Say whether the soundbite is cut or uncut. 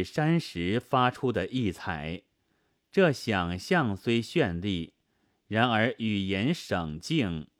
uncut